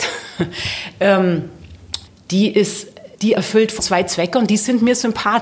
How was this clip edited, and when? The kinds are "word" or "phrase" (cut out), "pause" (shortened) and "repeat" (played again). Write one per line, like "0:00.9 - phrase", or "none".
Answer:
0:02.1 - pause
0:03.1 - pause
0:03.8 - word